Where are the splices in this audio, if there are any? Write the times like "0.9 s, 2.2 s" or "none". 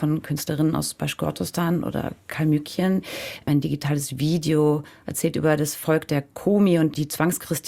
none